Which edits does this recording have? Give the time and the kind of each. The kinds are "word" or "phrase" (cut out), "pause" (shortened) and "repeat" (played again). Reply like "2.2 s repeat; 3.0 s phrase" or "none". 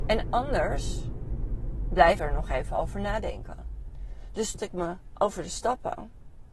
2.2 s word; 4.6 s word; 5.1 s phrase

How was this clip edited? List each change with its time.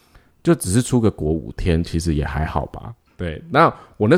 3.1 s pause

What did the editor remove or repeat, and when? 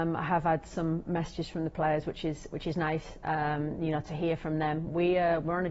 none

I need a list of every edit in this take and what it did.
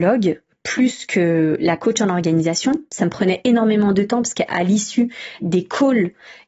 5.4 s word

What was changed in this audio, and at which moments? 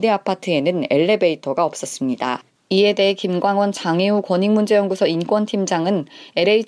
2.5 s pause

